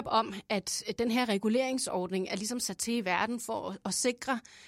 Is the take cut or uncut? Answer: uncut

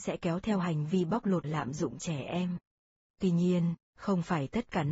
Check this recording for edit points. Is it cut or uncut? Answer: cut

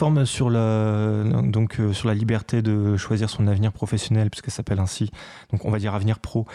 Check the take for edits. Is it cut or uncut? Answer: uncut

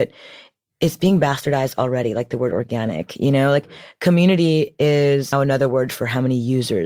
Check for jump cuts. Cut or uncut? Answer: cut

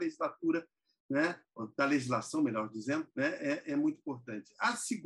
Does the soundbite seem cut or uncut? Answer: cut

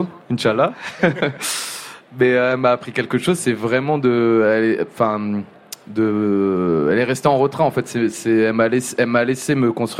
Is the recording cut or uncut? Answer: uncut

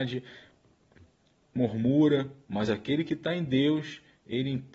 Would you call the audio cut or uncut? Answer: uncut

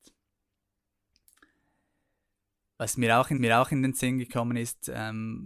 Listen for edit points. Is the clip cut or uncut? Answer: cut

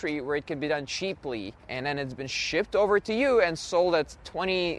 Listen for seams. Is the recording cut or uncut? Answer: cut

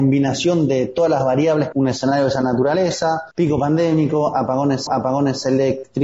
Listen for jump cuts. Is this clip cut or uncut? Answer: cut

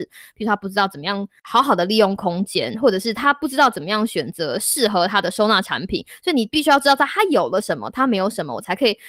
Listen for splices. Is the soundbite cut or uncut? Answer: uncut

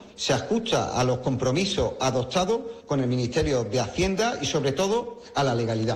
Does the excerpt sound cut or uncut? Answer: uncut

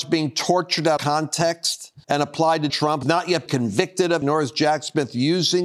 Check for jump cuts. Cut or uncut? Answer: cut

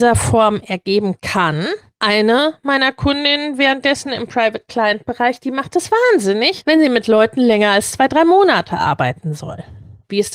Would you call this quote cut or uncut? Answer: uncut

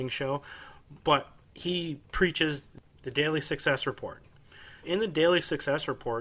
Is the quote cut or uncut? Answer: cut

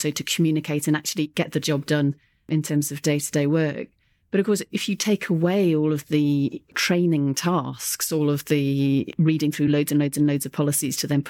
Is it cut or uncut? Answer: uncut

